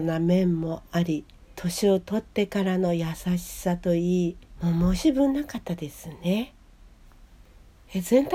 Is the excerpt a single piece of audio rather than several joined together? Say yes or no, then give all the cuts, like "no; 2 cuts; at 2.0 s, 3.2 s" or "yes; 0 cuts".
yes; 0 cuts